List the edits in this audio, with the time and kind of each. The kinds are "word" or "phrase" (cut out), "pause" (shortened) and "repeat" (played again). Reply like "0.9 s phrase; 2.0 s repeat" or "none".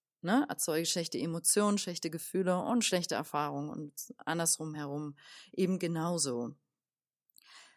none